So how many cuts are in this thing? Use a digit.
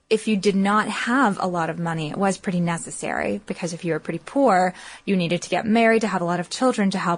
0